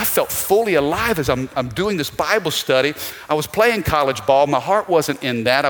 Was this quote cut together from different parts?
no; 0 cuts

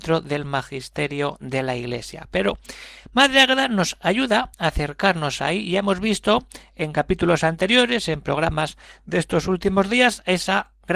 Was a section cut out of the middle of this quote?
no; 0 cuts

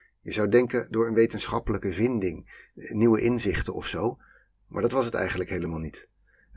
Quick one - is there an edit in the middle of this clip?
no; 0 cuts

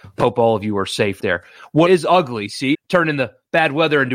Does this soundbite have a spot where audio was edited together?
yes; 3 cuts; at 1.2 s, 1.9 s, 2.7 s

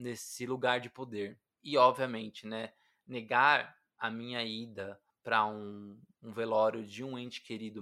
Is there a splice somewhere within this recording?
no; 0 cuts

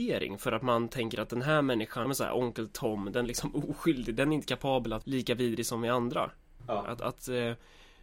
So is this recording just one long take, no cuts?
no; 3 cuts; at 2.0 s, 3.2 s, 5.0 s

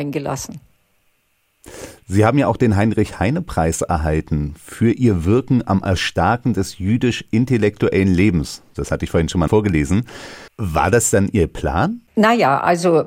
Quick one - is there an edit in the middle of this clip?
yes; 2 cuts; at 10.5 s, 12.1 s

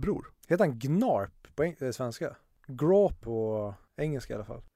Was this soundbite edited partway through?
yes; 1 cut; at 3.2 s

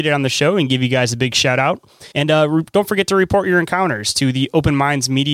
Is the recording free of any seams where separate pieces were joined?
no; 1 cut; at 2.1 s

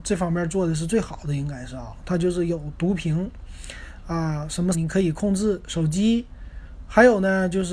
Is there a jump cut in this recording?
yes; 1 cut; at 4.7 s

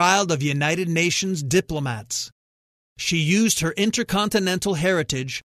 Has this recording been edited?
no; 0 cuts

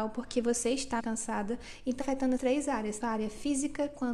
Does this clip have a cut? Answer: yes; 4 cuts; at 1.0 s, 2.0 s, 2.4 s, 3.0 s

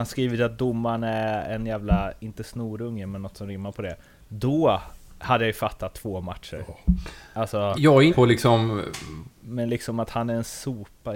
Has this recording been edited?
yes; 2 cuts; at 7.7 s, 8.1 s

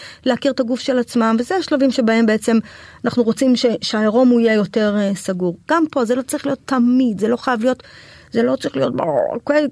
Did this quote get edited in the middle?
no; 0 cuts

